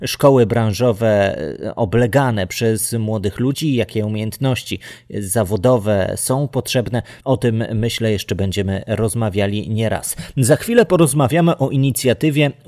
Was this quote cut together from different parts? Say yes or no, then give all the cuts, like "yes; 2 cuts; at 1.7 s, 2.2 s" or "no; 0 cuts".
yes; 1 cut; at 7.2 s